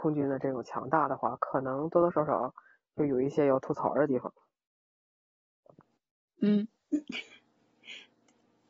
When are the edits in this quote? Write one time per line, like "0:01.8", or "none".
none